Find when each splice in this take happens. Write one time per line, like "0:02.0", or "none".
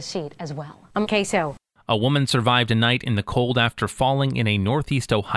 0:01.1